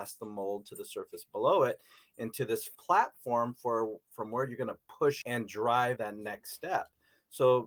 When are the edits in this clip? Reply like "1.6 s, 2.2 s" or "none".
2.7 s, 5.2 s, 6.0 s